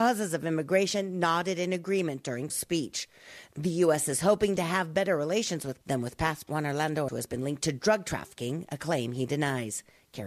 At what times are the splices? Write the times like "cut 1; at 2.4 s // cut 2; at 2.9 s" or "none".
cut 1; at 2.5 s // cut 2; at 5.8 s // cut 3; at 6.5 s // cut 4; at 7.1 s